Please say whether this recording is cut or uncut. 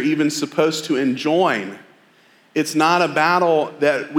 uncut